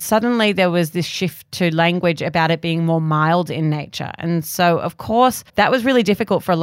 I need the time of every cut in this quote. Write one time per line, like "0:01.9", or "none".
0:05.5